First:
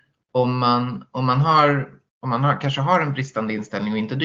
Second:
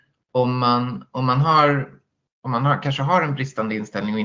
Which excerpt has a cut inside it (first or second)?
first